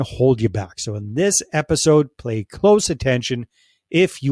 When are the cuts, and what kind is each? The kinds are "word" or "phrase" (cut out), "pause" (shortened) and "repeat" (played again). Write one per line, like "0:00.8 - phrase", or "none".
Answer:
none